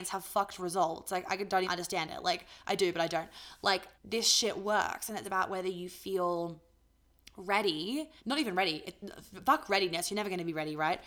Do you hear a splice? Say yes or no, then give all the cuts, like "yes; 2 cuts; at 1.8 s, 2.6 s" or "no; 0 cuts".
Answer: yes; 4 cuts; at 1.6 s, 3.9 s, 5.2 s, 8.2 s